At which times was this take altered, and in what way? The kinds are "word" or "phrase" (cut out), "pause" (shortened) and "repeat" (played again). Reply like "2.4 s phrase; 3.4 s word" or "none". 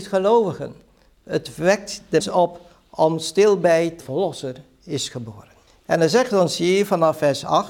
2.2 s word; 4.0 s phrase; 5.7 s pause